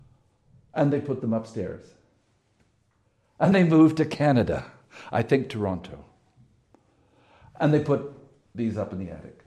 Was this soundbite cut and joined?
yes; 1 cut; at 3.5 s

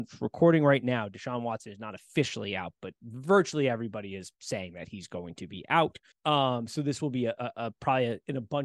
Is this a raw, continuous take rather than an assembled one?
no; 2 cuts; at 4.3 s, 6.1 s

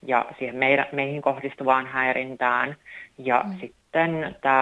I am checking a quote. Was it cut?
no; 0 cuts

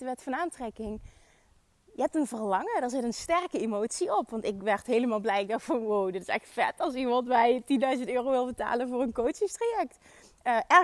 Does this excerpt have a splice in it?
no; 0 cuts

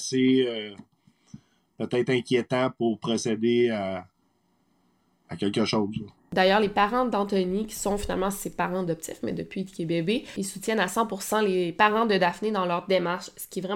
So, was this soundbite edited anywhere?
no; 0 cuts

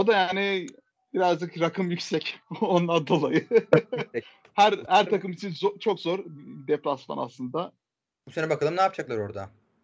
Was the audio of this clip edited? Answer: no; 0 cuts

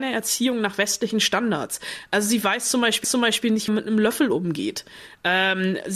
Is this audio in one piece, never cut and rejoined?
no; 2 cuts; at 3.0 s, 3.7 s

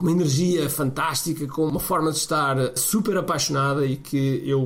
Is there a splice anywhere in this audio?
no; 0 cuts

